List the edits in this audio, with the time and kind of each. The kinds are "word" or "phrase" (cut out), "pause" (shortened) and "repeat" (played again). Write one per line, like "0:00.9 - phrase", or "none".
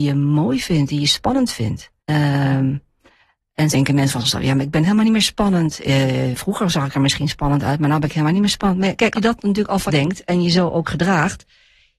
0:02.0 - pause
0:03.7 - word
0:09.1 - word
0:09.9 - phrase